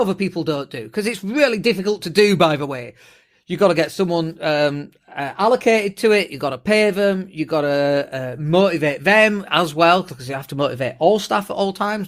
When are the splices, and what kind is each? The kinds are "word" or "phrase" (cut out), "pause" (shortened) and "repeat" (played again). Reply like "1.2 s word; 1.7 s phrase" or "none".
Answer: none